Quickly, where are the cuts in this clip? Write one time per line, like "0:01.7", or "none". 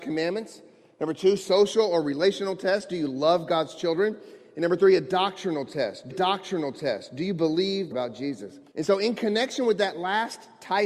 0:06.1
0:07.9
0:08.7